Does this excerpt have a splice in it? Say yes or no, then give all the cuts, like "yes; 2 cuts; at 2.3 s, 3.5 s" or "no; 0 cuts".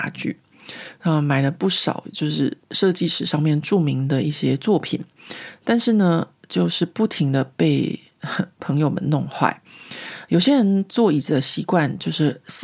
yes; 1 cut; at 2.6 s